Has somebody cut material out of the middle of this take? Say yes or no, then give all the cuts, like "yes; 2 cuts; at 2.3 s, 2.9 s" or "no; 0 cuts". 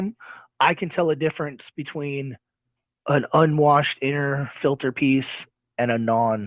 no; 0 cuts